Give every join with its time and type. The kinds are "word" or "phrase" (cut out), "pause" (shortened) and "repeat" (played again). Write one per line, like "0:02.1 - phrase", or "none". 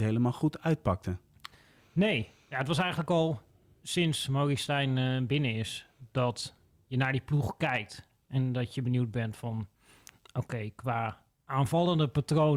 none